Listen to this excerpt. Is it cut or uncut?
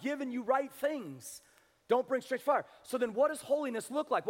uncut